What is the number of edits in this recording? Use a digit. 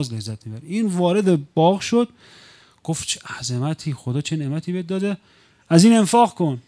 0